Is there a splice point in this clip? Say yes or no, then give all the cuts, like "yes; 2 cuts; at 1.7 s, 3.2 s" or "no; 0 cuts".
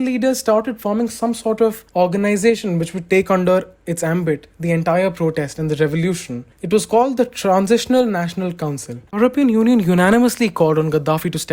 yes; 2 cuts; at 1.9 s, 9.1 s